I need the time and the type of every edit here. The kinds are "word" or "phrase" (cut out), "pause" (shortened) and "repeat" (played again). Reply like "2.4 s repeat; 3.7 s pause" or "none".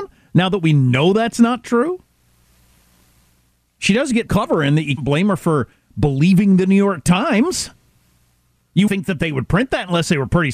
4.3 s word; 5.0 s word; 8.9 s word